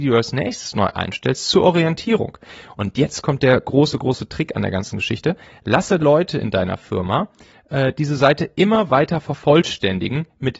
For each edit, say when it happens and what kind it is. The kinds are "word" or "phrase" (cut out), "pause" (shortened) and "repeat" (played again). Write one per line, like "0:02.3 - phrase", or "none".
0:06.0 - phrase